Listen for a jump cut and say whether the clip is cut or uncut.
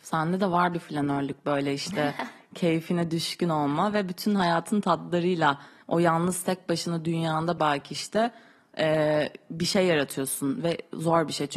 uncut